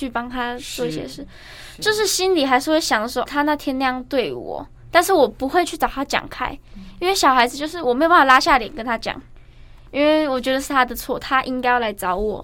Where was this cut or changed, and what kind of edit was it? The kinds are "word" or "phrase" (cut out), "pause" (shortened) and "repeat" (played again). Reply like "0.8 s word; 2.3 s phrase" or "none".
3.3 s word